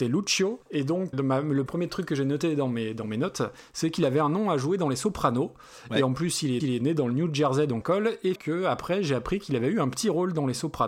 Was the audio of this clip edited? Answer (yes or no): yes